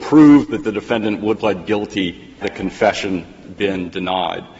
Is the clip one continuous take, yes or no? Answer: no